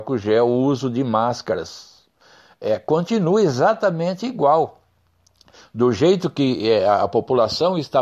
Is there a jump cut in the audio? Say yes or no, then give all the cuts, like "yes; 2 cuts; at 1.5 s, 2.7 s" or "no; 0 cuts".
no; 0 cuts